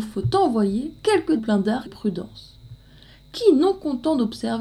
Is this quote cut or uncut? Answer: cut